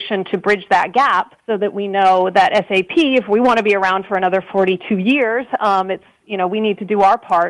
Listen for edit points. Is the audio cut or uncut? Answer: cut